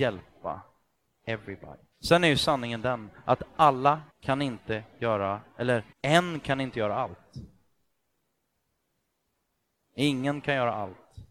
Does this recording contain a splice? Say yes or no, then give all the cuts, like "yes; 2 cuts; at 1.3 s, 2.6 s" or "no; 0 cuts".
yes; 3 cuts; at 1.9 s, 4.1 s, 5.9 s